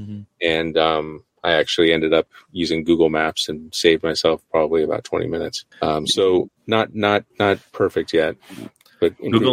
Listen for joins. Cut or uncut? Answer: cut